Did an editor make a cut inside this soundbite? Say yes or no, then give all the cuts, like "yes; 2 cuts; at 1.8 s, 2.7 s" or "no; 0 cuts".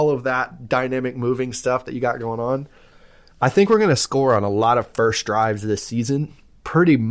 no; 0 cuts